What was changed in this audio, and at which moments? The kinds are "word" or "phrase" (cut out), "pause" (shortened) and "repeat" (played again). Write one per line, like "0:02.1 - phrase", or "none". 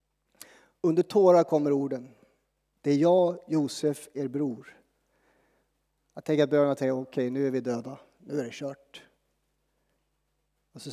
none

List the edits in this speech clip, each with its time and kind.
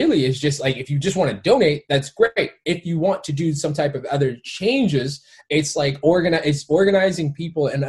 none

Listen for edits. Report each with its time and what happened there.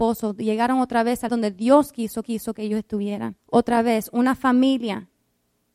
0:01.3 - word
0:02.2 - repeat
0:03.4 - pause

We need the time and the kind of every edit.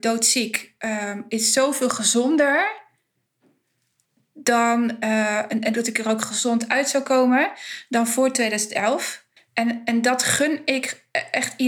0:05.7 - phrase
0:09.4 - pause

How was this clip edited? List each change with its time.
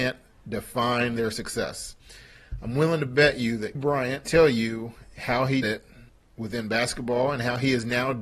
0:03.7 - word
0:04.2 - word
0:05.6 - word
0:06.1 - pause

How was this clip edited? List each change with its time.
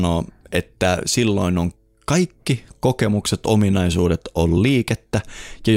none

